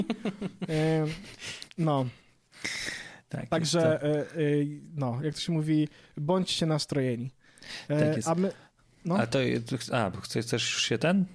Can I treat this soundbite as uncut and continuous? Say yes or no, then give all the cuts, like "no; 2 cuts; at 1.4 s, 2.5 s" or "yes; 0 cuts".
yes; 0 cuts